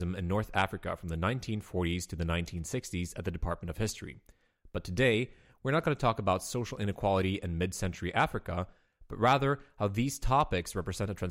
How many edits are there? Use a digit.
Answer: 0